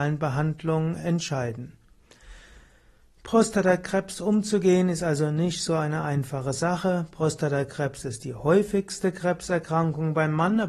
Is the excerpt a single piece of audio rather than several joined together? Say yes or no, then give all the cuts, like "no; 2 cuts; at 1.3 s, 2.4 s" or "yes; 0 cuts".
yes; 0 cuts